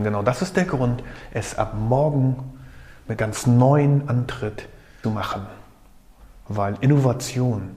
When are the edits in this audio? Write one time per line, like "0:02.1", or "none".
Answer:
0:03.2
0:05.0